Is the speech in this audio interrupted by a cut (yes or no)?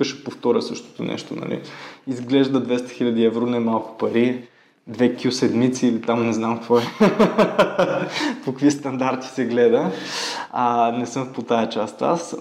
no